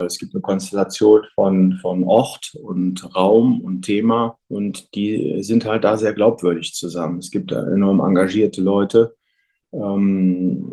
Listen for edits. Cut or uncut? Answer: cut